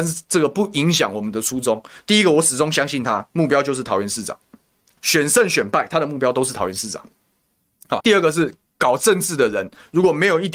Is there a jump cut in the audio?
yes; 2 cuts; at 5.0 s, 8.0 s

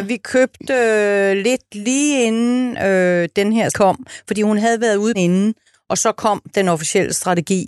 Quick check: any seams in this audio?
yes; 2 cuts; at 3.7 s, 5.1 s

